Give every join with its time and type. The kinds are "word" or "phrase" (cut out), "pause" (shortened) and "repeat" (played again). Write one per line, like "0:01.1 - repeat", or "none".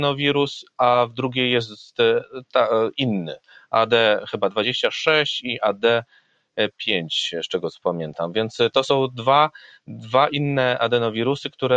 none